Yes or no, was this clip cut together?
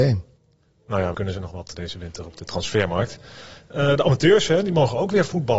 yes